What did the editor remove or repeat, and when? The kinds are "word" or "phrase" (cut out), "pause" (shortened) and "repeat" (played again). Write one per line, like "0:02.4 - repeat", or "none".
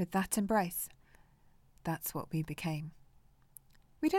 none

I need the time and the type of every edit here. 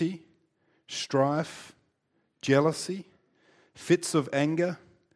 none

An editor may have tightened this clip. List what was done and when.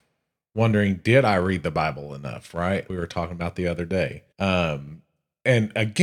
0:02.9 - word
0:04.3 - pause

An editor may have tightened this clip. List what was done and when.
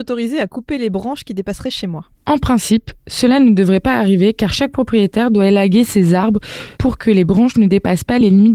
0:02.1 - pause
0:06.7 - pause

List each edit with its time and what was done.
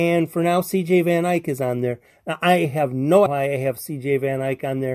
0:03.3 - word

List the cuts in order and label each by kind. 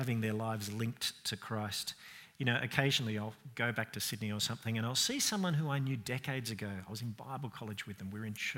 none

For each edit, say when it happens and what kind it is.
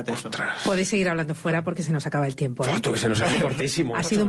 none

